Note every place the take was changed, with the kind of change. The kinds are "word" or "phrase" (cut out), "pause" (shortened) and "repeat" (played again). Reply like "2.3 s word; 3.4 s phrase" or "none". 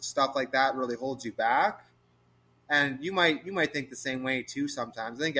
none